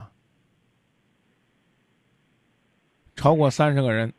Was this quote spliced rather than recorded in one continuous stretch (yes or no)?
no